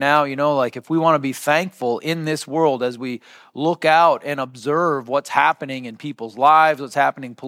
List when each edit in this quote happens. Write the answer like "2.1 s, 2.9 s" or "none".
none